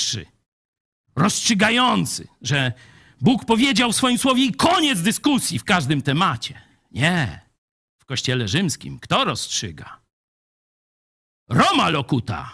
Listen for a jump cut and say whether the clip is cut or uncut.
uncut